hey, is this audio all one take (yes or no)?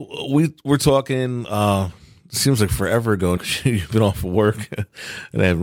no